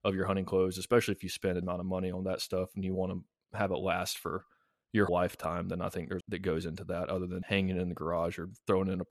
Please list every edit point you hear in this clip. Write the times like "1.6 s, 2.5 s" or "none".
1.6 s, 5.1 s, 6.2 s, 7.4 s